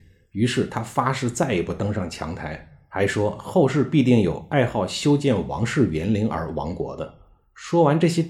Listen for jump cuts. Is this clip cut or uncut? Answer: uncut